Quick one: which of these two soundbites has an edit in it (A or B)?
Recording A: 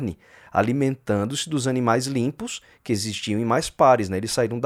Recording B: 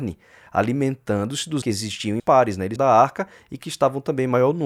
B